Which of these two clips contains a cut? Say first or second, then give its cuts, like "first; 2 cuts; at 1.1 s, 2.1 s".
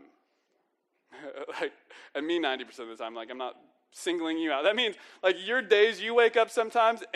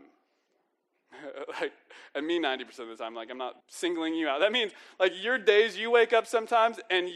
second; 1 cut; at 3.6 s